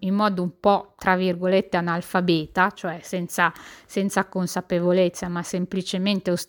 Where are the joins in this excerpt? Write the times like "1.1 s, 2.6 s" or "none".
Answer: none

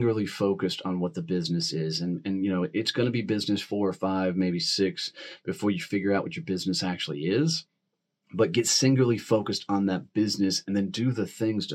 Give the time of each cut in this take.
none

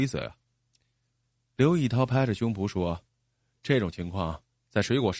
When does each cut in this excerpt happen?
3.1 s

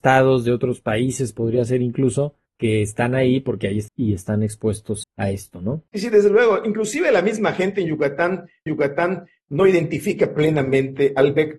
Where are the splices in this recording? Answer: 2.5 s, 3.9 s, 5.0 s, 5.9 s, 8.7 s

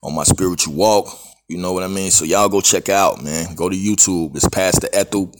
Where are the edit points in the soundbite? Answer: none

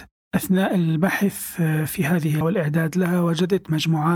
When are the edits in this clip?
2.4 s

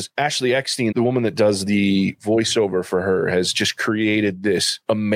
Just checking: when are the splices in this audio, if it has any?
0.9 s

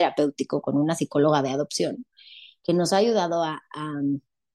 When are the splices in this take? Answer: none

